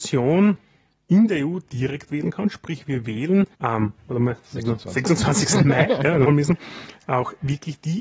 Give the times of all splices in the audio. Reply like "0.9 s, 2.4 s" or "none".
1.7 s, 3.5 s, 4.0 s, 6.2 s